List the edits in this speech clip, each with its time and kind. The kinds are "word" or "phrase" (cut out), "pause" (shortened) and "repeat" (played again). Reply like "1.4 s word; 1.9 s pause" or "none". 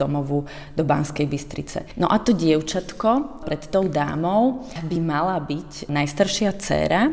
none